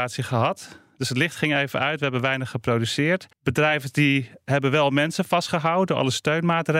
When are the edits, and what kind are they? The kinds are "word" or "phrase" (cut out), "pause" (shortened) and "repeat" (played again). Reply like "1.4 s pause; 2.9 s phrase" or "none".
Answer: 3.3 s pause